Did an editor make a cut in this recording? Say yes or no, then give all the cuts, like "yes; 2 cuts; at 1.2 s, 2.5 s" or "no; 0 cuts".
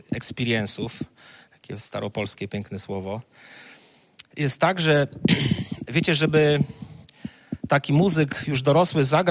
no; 0 cuts